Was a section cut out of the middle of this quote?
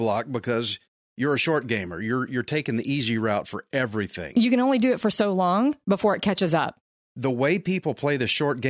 no; 0 cuts

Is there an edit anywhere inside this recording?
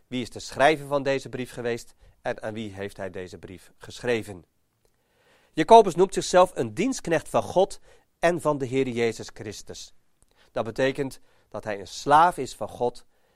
no; 0 cuts

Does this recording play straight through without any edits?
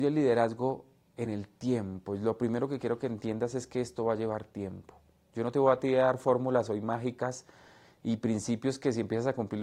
yes; 0 cuts

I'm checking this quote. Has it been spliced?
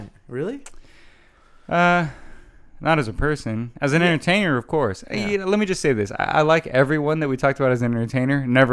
no; 0 cuts

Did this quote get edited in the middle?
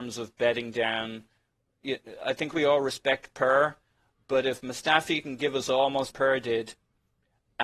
yes; 1 cut; at 6.1 s

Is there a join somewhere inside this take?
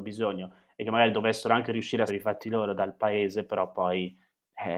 yes; 1 cut; at 2.1 s

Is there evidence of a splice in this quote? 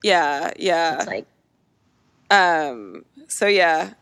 no; 0 cuts

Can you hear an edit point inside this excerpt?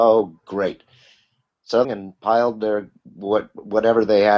yes; 1 cut; at 1.8 s

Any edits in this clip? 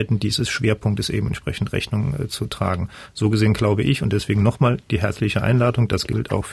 no; 0 cuts

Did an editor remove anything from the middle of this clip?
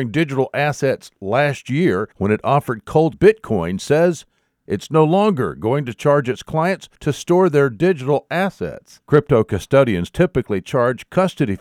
yes; 4 cuts; at 2.1 s, 3.1 s, 6.9 s, 9.0 s

